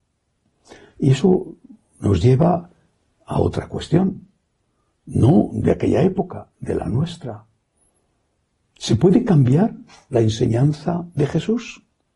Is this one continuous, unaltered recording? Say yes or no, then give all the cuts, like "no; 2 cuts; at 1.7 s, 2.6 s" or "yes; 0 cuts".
yes; 0 cuts